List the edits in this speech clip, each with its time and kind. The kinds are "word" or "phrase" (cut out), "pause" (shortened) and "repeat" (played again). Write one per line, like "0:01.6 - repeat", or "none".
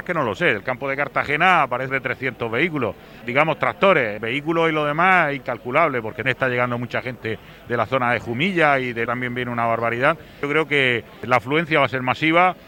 0:01.9 - phrase
0:03.2 - word
0:06.2 - word
0:09.1 - word